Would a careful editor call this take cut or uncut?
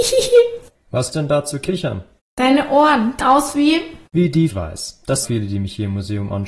cut